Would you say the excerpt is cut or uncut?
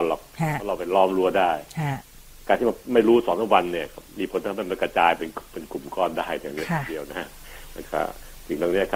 cut